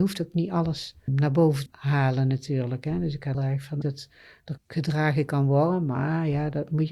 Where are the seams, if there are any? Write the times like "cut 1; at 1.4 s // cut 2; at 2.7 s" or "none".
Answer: cut 1; at 1.1 s // cut 2; at 1.7 s // cut 3; at 3.3 s // cut 4; at 3.8 s // cut 5; at 4.6 s